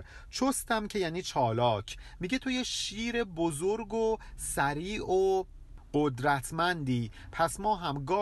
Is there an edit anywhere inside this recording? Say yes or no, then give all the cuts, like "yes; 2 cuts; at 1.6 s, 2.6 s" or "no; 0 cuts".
no; 0 cuts